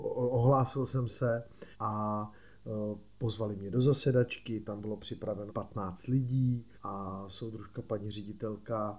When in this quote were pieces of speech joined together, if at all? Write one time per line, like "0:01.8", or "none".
0:01.7
0:05.5
0:06.8